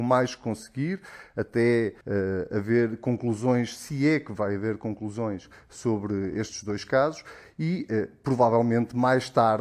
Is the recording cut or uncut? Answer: cut